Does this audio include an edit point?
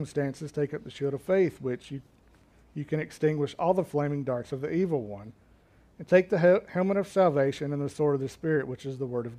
no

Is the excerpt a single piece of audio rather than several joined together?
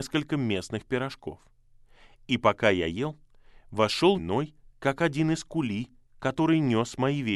no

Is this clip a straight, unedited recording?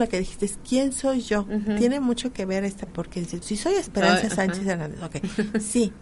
no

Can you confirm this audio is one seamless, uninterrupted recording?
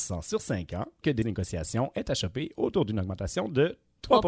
no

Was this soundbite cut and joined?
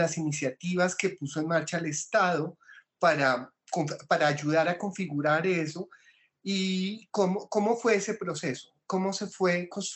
no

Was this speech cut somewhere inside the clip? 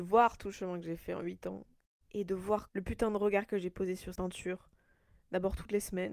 yes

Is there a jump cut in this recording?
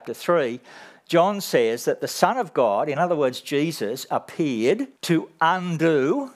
yes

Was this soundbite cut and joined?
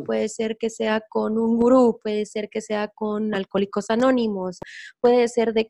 no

